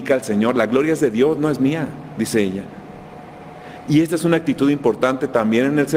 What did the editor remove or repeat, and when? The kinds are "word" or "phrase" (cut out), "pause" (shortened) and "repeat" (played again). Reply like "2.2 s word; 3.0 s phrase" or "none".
none